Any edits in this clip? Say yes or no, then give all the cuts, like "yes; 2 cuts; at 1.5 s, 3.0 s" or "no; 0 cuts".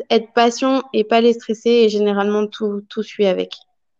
no; 0 cuts